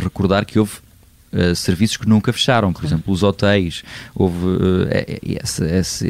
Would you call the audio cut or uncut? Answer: uncut